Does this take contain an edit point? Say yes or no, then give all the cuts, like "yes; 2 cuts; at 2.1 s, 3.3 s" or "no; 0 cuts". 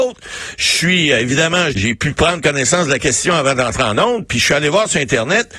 yes; 1 cut; at 1.7 s